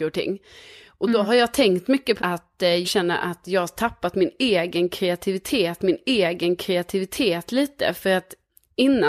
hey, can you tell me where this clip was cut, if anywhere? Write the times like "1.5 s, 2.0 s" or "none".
2.2 s, 2.8 s, 5.8 s